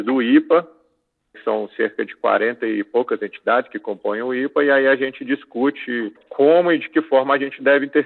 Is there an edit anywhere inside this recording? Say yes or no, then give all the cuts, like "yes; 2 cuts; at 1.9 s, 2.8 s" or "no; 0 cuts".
yes; 1 cut; at 1.3 s